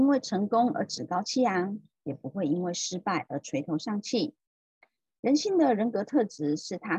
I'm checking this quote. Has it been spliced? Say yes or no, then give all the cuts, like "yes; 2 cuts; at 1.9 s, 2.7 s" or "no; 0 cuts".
no; 0 cuts